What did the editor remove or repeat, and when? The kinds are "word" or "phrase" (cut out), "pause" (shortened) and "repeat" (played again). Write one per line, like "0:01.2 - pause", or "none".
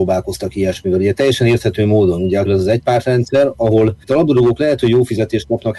0:02.4 - word
0:04.0 - pause

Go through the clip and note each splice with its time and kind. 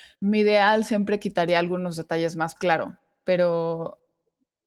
0:02.6 - phrase

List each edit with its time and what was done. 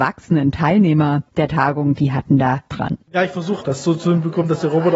0:02.7 - word
0:03.0 - pause
0:03.6 - word

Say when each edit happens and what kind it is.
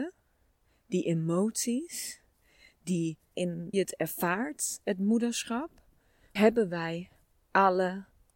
0:03.3 - word
0:03.7 - word
0:06.4 - word

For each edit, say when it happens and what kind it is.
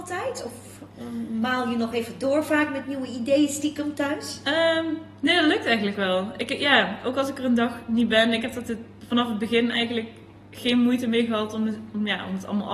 none

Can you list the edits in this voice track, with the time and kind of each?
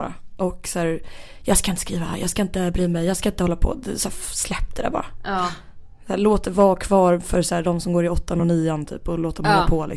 none

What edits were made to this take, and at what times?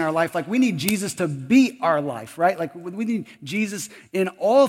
none

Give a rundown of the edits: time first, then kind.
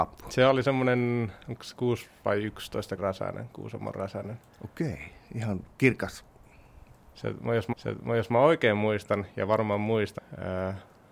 0:03.0 - word
0:07.7 - repeat
0:10.2 - phrase

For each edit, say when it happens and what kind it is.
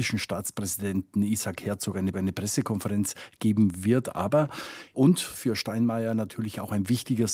0:02.1 - repeat
0:04.9 - phrase

